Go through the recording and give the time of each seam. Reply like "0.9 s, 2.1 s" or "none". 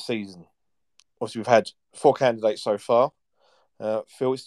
1.0 s